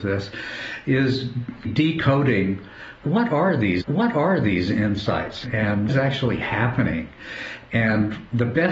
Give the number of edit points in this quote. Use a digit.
3